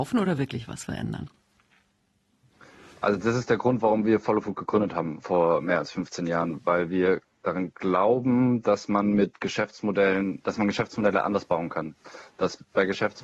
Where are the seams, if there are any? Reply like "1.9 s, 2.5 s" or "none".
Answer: none